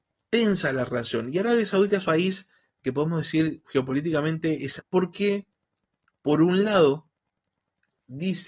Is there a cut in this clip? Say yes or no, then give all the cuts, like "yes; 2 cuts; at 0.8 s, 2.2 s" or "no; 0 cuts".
yes; 3 cuts; at 2.0 s, 2.8 s, 4.8 s